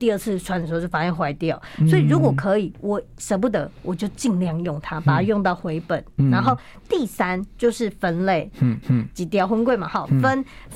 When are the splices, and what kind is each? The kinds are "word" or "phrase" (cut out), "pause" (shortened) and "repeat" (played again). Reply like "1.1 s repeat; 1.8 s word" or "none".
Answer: 8.8 s repeat